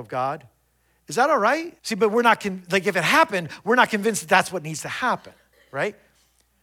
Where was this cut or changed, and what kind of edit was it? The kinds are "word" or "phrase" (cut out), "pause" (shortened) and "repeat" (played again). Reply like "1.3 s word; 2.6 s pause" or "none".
1.8 s pause

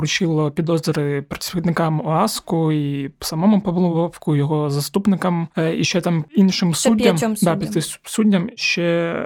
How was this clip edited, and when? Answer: none

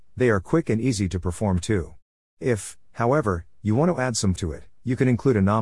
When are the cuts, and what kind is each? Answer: 4.4 s word

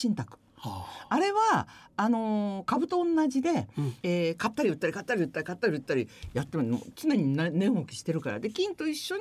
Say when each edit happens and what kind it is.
4.0 s pause

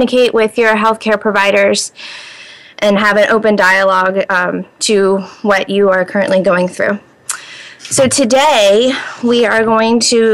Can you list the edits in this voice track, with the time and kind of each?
none

